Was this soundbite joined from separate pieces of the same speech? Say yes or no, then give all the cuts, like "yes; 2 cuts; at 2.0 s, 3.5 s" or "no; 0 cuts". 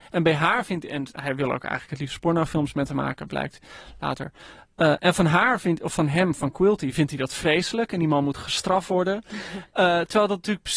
no; 0 cuts